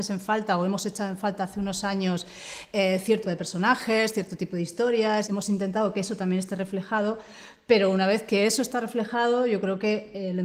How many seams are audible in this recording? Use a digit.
2